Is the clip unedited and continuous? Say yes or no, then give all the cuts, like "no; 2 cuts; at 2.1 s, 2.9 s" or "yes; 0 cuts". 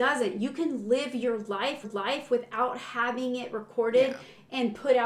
no; 1 cut; at 1.8 s